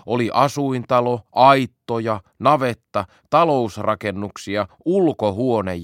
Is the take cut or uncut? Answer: uncut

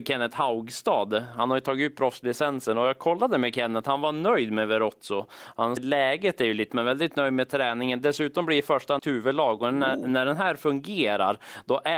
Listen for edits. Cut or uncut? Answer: cut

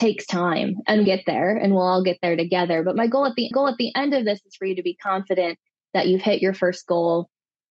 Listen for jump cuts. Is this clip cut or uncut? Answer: cut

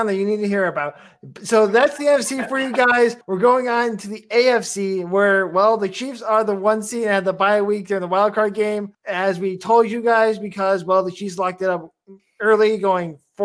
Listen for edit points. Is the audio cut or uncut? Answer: cut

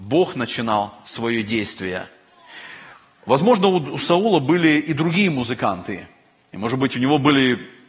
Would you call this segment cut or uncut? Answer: uncut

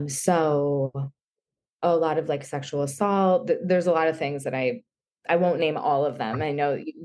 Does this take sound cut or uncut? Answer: uncut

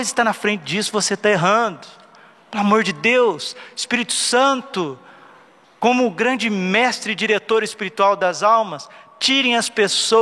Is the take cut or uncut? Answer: uncut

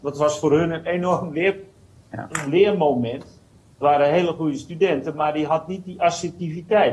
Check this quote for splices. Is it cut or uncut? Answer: uncut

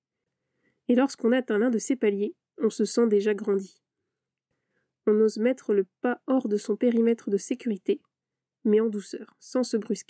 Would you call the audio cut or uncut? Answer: uncut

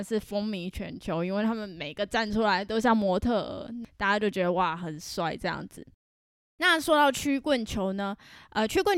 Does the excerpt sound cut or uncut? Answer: uncut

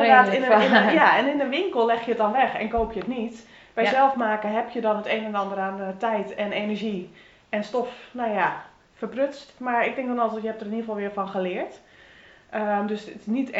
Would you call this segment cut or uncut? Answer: uncut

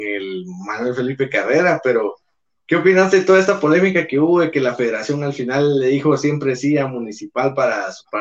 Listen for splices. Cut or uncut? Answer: uncut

